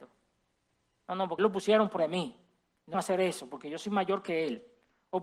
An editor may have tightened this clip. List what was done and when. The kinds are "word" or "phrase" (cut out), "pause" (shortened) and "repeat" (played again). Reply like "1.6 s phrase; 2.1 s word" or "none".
1.4 s word; 2.0 s word; 2.9 s word

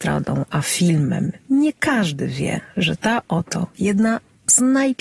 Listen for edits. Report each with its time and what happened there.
none

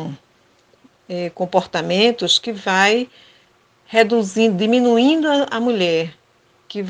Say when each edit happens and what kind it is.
none

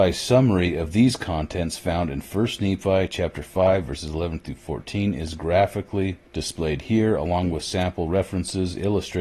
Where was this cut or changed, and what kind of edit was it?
6.3 s pause

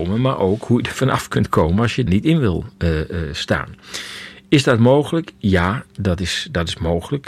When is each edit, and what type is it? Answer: 0.9 s word; 2.1 s word

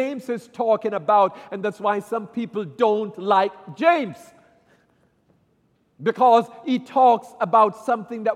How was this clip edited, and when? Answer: none

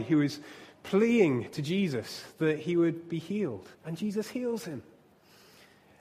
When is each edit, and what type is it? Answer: 3.7 s pause

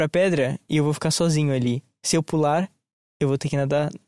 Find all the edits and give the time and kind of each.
none

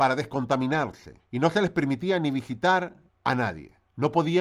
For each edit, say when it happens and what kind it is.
none

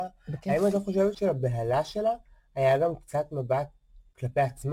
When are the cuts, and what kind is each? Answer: 1.1 s word

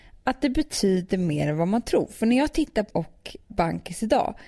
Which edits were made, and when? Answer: 2.9 s word

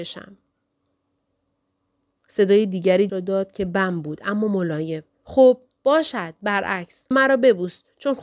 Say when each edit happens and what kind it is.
3.1 s word; 5.1 s pause; 7.1 s word

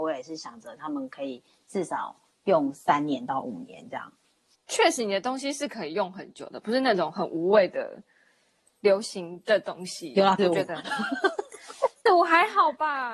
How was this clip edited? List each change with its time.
10.4 s word; 12.1 s word

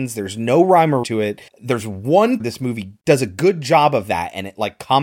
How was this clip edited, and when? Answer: 1.0 s word; 1.5 s pause; 2.4 s phrase; 3.0 s pause

